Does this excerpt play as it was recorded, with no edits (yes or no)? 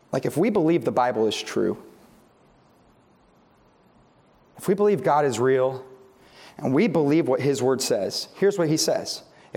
yes